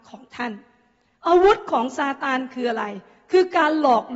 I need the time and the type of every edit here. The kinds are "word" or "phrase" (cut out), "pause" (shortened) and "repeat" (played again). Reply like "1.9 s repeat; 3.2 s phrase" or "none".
none